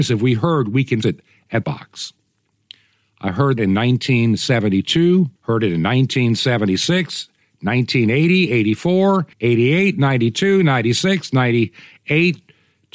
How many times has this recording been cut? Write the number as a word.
five